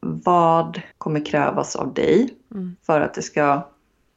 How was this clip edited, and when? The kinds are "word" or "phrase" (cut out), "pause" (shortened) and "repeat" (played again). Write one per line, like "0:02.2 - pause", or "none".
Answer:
0:00.9 - pause